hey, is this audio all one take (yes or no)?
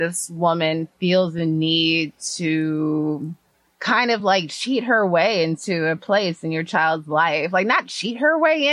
yes